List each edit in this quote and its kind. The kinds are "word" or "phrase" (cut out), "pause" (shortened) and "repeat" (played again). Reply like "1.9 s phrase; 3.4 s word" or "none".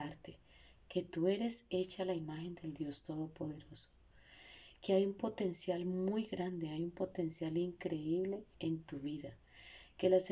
8.5 s pause